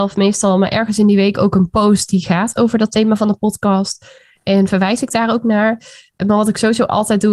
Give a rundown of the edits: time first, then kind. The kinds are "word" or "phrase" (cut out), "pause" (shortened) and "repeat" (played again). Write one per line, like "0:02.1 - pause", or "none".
none